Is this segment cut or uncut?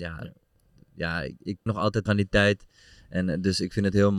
cut